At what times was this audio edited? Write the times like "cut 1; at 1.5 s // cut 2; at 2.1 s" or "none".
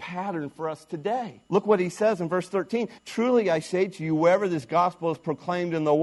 cut 1; at 1.5 s // cut 2; at 3.0 s